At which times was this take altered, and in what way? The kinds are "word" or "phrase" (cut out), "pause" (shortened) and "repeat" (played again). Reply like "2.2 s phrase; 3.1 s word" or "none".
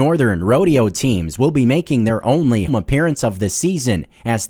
2.7 s word